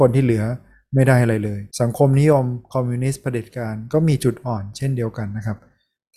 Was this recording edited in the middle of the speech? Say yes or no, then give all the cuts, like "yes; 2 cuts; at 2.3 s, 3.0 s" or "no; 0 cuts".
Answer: yes; 1 cut; at 1.7 s